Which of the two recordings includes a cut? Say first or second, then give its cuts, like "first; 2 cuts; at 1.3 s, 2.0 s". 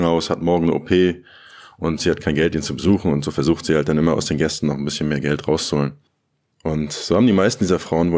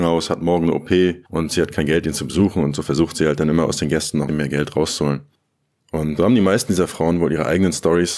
second; 3 cuts; at 1.2 s, 4.3 s, 6.2 s